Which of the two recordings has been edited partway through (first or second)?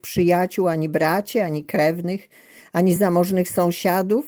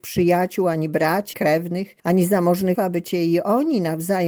second